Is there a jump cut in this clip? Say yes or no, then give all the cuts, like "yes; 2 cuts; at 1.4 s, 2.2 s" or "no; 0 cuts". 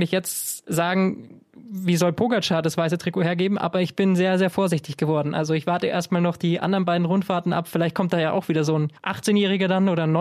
yes; 1 cut; at 9.0 s